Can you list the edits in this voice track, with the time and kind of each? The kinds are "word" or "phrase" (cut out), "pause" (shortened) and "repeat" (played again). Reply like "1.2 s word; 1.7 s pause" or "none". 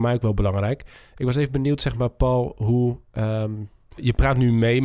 none